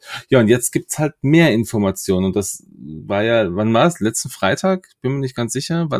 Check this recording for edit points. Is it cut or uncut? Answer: uncut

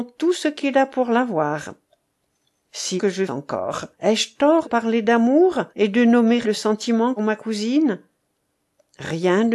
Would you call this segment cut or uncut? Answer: cut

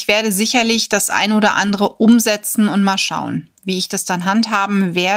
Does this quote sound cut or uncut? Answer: uncut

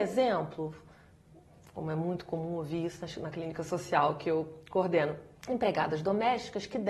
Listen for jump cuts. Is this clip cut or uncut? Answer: cut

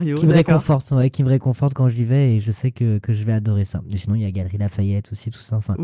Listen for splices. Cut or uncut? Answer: uncut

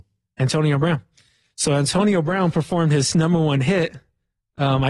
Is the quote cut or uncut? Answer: uncut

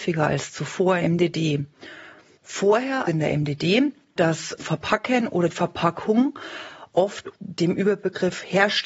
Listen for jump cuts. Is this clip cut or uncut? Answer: cut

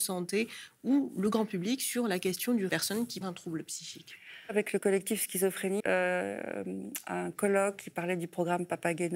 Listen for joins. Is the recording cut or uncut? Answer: cut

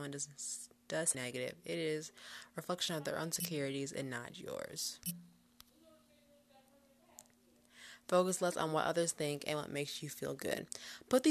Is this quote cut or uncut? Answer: cut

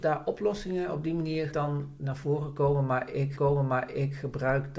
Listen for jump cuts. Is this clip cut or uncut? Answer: cut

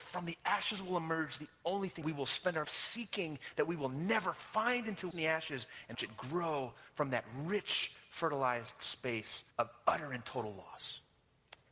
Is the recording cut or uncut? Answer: cut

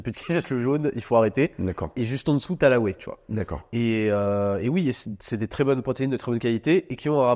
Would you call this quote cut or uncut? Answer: uncut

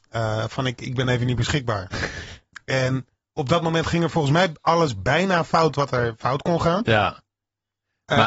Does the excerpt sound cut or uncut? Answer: uncut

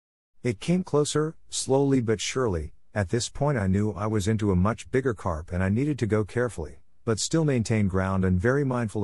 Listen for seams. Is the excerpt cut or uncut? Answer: uncut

